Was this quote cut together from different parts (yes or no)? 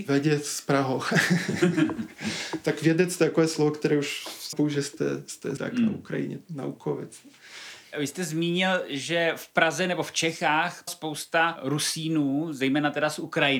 yes